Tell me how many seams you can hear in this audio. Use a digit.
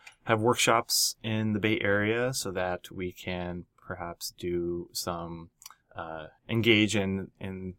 0